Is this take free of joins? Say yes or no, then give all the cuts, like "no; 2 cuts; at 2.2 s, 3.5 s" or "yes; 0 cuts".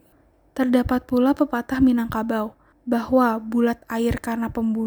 no; 1 cut; at 2.7 s